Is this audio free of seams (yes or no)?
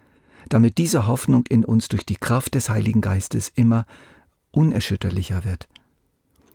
yes